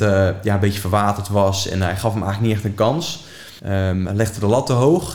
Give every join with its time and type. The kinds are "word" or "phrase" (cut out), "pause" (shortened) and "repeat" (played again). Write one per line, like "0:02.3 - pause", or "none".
0:03.6 - pause